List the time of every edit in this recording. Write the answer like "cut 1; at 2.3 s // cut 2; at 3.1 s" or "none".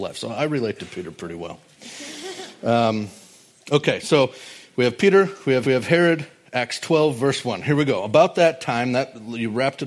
cut 1; at 5.6 s